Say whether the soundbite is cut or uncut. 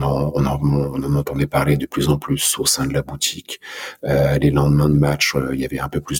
uncut